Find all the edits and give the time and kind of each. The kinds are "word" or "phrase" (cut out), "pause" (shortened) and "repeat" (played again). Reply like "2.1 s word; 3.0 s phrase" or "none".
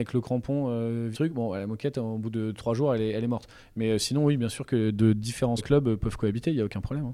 1.1 s word; 5.6 s word